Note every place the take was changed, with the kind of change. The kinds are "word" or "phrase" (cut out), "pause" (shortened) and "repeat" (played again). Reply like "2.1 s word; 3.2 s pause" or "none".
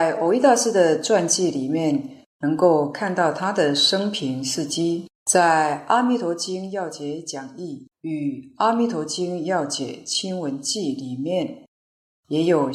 5.2 s pause; 7.9 s pause